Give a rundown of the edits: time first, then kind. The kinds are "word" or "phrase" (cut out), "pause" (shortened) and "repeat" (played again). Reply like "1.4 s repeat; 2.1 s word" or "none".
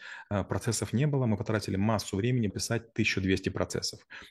2.5 s phrase